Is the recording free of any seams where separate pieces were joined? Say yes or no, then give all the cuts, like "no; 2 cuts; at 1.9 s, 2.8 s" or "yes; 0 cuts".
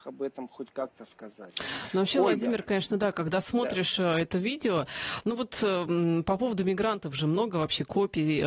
yes; 0 cuts